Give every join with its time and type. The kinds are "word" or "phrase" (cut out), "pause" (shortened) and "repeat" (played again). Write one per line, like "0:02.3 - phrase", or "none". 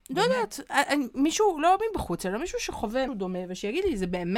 0:03.1 - word